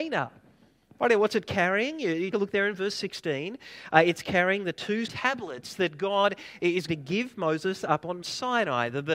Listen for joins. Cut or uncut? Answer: cut